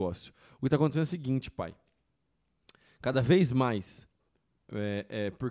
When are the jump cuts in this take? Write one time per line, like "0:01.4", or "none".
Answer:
none